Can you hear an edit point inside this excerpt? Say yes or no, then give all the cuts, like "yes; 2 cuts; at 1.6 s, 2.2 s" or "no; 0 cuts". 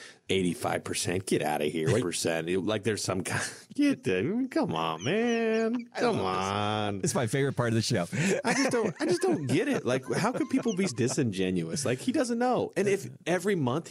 yes; 2 cuts; at 2.0 s, 10.9 s